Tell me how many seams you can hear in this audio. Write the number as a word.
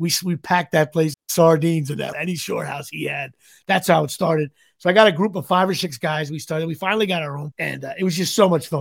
three